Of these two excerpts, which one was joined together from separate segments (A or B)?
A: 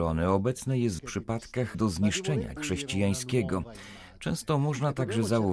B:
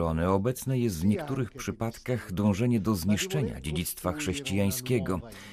A